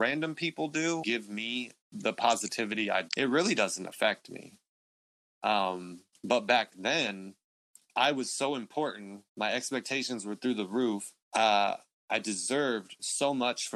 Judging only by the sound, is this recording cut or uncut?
cut